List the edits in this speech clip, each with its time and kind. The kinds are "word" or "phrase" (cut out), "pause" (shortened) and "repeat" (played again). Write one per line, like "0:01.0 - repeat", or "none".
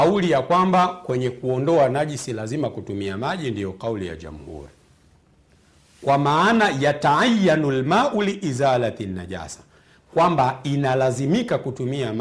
none